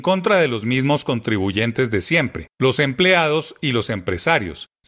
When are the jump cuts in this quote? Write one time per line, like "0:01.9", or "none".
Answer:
none